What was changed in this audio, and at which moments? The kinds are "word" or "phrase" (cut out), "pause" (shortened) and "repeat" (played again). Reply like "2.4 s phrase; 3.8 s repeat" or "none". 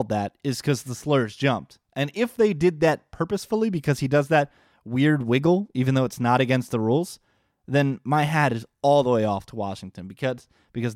none